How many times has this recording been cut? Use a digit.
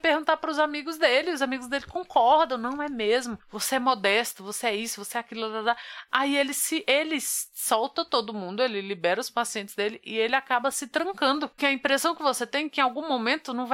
1